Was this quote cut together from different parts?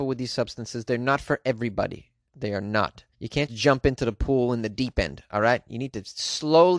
yes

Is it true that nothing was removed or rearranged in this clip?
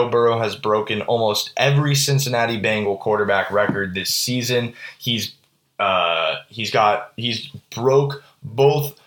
yes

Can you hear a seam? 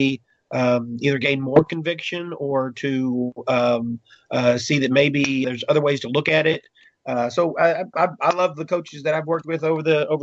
yes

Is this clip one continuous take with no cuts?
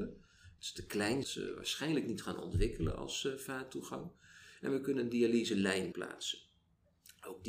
no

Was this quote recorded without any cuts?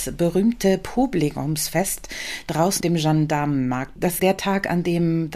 no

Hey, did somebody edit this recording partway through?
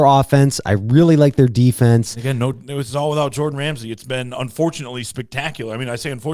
no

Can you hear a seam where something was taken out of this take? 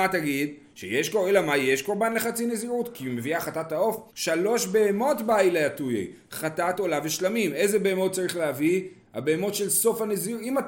yes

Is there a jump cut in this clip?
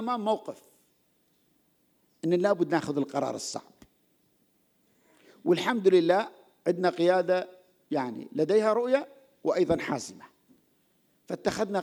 no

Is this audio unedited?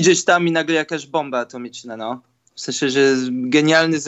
yes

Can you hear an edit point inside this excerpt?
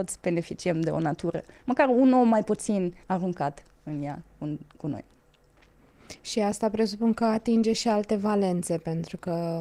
yes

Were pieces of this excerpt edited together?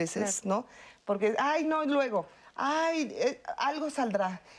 no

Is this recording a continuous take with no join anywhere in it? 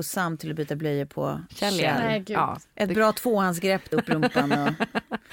no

